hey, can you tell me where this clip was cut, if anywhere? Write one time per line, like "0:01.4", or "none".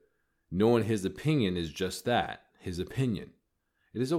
0:02.5